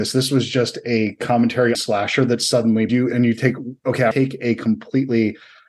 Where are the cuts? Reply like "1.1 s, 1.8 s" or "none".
1.7 s, 2.9 s, 4.1 s